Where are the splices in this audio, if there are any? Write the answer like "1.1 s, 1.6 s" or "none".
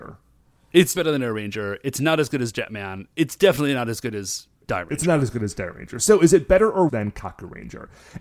0.9 s, 4.5 s, 6.9 s